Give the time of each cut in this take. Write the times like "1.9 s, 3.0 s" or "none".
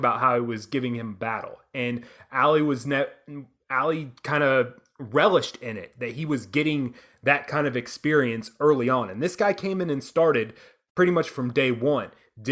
none